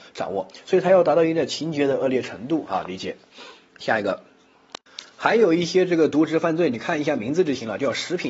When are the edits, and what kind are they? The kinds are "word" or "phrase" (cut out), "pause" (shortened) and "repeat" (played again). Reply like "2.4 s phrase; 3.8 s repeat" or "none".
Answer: 3.7 s pause; 5.1 s word